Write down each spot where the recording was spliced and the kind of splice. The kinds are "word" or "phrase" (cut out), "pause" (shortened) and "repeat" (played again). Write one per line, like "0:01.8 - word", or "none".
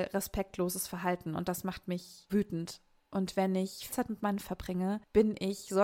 0:02.3 - word
0:03.9 - word
0:04.4 - word